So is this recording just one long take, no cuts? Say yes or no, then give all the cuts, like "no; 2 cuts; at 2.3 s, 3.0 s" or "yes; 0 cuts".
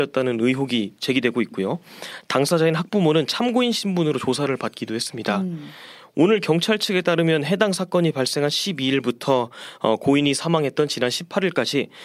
yes; 0 cuts